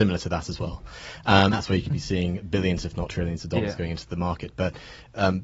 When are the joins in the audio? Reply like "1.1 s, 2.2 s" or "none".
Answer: 1.5 s